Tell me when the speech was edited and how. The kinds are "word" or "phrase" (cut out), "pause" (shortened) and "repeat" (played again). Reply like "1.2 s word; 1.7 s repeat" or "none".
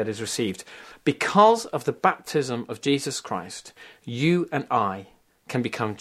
none